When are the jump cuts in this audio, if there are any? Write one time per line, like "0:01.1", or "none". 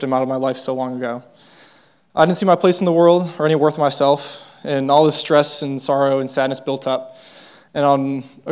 none